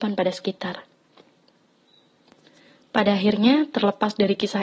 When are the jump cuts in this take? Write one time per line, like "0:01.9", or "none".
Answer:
none